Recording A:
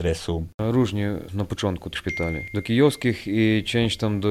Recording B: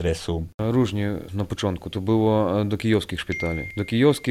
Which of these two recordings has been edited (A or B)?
A